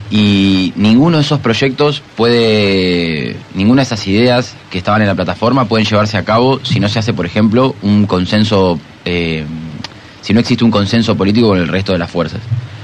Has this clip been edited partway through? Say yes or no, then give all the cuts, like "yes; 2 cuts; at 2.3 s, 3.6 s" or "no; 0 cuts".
no; 0 cuts